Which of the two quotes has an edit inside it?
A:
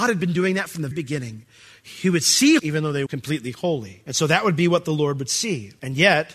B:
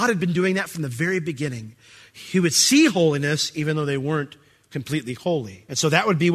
A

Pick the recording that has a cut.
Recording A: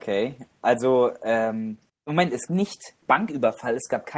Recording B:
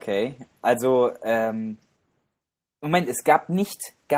A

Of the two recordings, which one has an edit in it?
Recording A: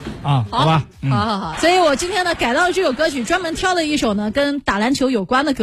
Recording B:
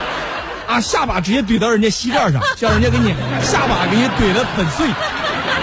A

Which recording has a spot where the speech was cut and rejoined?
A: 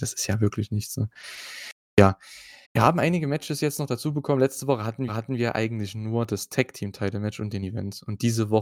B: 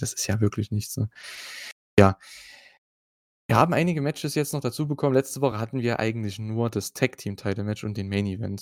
A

